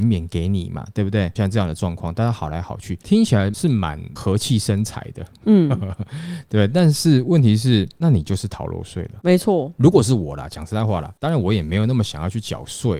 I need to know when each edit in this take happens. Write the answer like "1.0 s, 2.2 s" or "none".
none